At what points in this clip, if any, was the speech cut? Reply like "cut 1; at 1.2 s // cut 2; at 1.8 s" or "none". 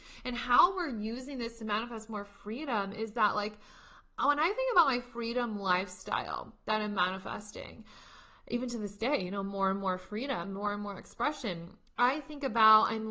none